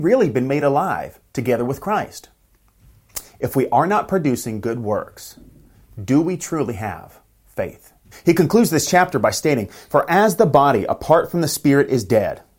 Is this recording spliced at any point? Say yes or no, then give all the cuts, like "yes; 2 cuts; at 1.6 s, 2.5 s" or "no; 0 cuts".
yes; 1 cut; at 8.1 s